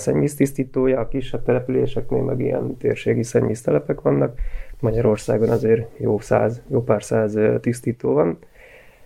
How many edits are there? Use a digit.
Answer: 0